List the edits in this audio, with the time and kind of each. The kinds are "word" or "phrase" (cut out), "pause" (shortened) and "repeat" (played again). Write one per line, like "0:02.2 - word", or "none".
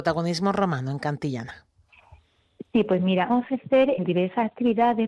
0:03.3 - word
0:04.0 - word